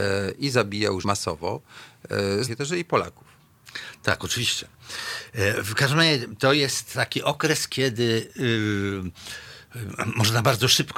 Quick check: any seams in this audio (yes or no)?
yes